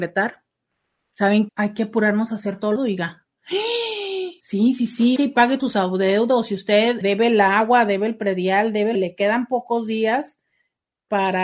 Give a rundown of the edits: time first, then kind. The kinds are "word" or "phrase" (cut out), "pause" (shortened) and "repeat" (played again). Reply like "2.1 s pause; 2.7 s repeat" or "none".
1.5 s word; 2.8 s phrase; 4.4 s pause; 5.2 s word; 5.6 s word; 7.0 s word; 8.9 s phrase